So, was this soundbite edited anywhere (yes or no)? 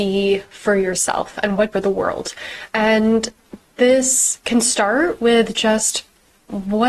yes